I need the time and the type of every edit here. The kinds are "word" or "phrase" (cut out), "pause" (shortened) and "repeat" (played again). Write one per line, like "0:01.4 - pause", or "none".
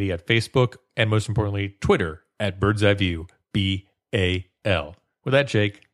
none